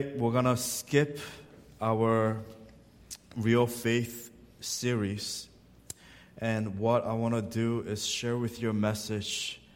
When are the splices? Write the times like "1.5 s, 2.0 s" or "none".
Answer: none